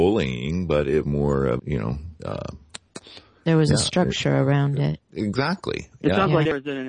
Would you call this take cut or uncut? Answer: cut